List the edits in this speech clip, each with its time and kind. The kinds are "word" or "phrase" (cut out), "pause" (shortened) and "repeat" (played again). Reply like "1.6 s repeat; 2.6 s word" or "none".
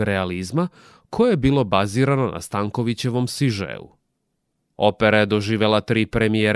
none

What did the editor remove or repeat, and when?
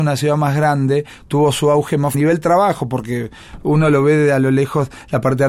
2.1 s phrase

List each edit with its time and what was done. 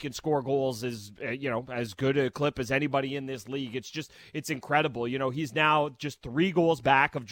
none

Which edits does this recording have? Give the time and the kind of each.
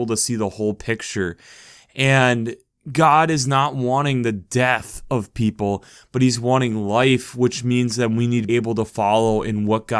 8.5 s word

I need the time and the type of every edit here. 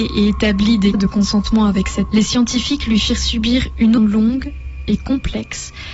0.9 s word; 2.1 s word; 4.0 s word

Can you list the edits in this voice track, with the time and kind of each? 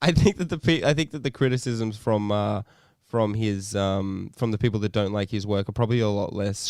none

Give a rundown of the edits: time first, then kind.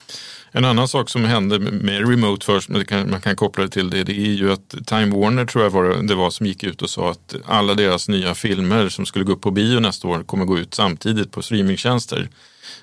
none

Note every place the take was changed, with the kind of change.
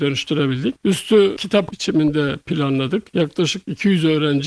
1.7 s word

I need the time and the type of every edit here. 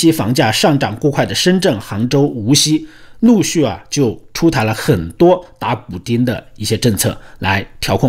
none

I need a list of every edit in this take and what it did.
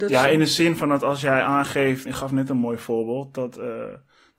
2.1 s word

